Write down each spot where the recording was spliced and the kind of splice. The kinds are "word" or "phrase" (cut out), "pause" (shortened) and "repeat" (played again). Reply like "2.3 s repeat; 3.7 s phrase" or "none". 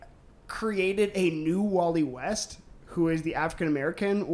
none

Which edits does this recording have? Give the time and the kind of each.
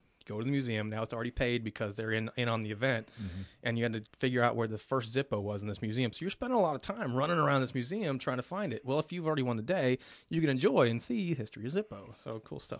4.1 s pause

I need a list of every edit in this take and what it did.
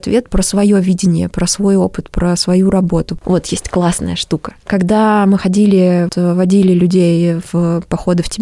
6.1 s word

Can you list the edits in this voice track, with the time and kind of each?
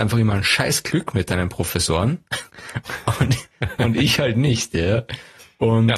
2.5 s pause

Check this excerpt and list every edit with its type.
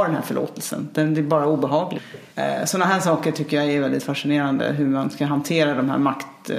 2.3 s pause

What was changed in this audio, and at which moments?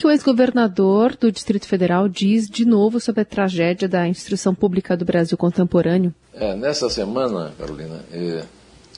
6.2 s pause

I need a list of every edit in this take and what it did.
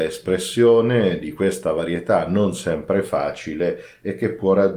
none

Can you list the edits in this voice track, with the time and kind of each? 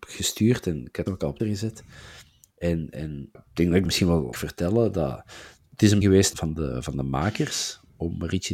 1.1 s word; 1.4 s word; 3.3 s word; 3.8 s word; 4.3 s word; 6.0 s word; 6.3 s word

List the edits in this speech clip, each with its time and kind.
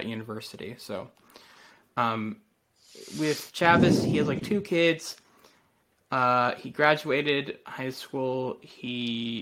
none

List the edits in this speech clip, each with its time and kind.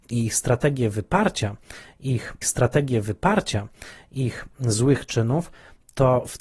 2.4 s repeat

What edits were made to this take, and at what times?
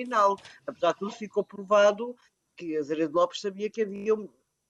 none

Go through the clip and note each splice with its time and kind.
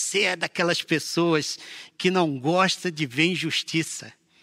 none

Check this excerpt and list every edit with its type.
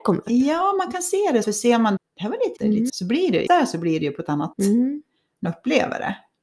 1.4 s word; 2.0 s word; 2.6 s word; 2.9 s word; 3.5 s word; 4.5 s word; 5.4 s word

